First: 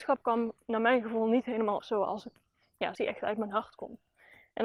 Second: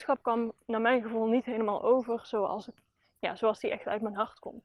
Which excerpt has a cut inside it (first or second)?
first